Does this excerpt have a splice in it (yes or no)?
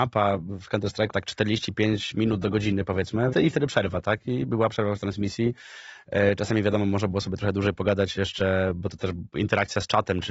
yes